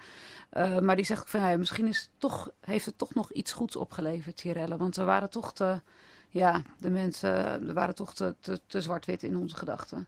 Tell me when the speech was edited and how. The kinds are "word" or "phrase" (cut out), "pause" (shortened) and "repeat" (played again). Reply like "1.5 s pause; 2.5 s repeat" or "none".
none